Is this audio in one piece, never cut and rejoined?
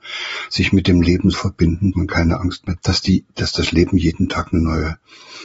no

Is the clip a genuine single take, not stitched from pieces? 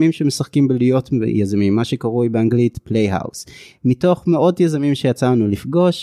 yes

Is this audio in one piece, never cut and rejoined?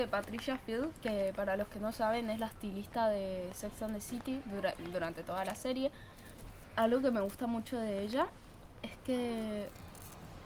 yes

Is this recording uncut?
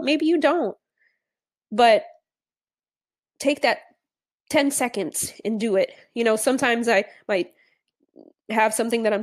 yes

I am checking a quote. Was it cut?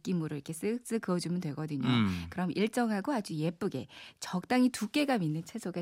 no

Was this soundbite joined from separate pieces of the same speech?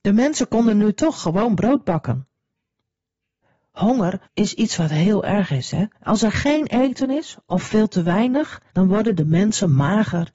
yes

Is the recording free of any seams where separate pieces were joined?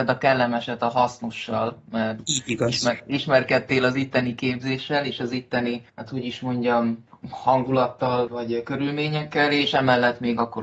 no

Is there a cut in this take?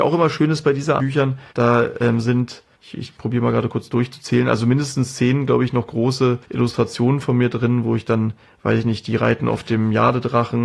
yes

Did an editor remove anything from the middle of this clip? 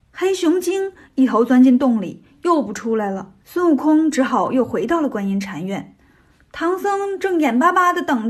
yes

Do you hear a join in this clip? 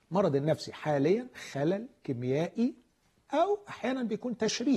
no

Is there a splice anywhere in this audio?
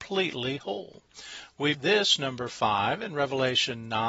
yes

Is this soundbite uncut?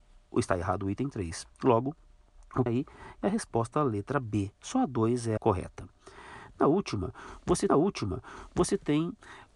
no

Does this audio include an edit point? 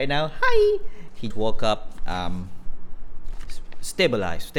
yes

